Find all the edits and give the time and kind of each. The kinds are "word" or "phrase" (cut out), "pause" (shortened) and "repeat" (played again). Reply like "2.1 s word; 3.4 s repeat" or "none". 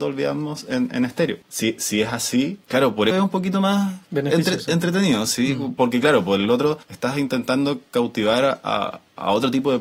3.1 s phrase; 6.8 s pause